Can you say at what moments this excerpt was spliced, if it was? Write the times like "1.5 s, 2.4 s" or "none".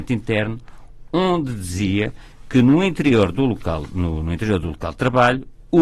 none